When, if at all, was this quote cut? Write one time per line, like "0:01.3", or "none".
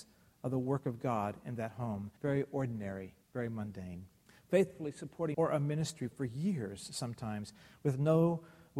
0:02.2
0:03.2
0:04.3
0:05.3